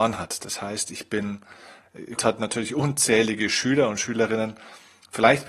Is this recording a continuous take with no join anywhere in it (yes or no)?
no